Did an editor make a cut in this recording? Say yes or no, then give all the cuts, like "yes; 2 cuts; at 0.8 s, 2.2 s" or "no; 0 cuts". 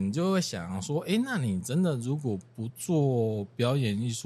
no; 0 cuts